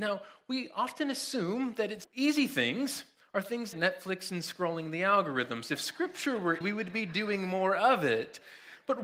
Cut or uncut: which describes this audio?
cut